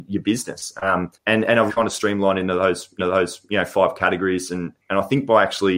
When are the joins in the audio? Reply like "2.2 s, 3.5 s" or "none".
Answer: 1.1 s, 1.7 s, 3.0 s